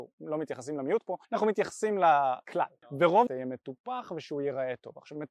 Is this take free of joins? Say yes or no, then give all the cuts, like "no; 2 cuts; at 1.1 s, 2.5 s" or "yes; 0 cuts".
no; 2 cuts; at 1.2 s, 3.3 s